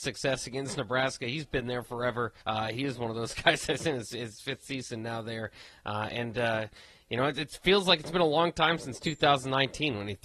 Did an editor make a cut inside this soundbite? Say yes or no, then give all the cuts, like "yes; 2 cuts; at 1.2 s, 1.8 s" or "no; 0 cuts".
yes; 1 cut; at 2.4 s